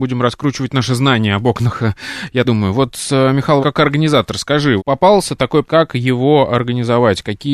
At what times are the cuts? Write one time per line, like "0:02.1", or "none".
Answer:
0:02.4
0:03.6
0:04.8
0:05.6